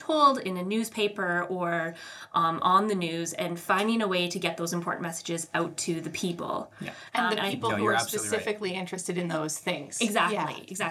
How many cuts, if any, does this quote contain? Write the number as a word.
one